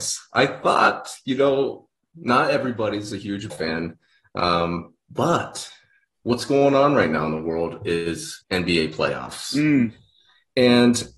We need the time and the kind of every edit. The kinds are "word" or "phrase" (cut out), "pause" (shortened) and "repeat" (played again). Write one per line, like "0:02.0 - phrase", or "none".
0:03.5 - word
0:08.4 - pause